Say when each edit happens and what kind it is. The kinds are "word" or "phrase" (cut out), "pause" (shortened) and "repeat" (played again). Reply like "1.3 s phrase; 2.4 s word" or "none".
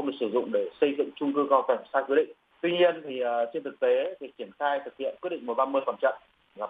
2.5 s pause

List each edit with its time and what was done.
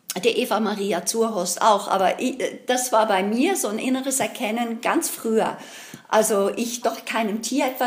6.8 s word

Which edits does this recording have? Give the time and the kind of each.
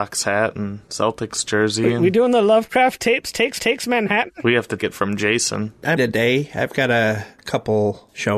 3.6 s repeat; 4.8 s word; 6.0 s phrase

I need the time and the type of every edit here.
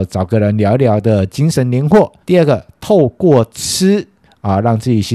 2.2 s pause

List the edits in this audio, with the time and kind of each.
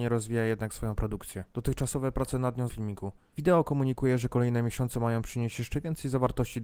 2.7 s phrase

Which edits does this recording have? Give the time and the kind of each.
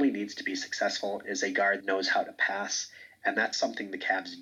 1.8 s word

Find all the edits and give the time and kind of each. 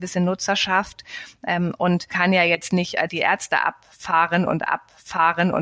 2.1 s word; 3.1 s word; 4.7 s repeat

